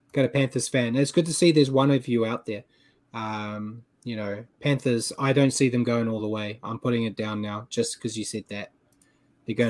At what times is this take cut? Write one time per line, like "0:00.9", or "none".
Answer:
none